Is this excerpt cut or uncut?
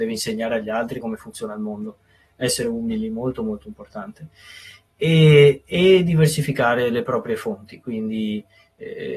uncut